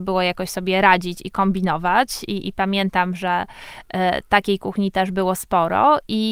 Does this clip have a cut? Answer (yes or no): no